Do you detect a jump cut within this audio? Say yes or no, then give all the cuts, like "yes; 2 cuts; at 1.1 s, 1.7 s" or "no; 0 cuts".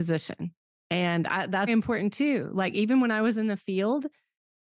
yes; 1 cut; at 1.7 s